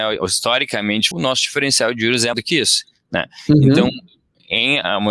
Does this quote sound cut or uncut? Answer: cut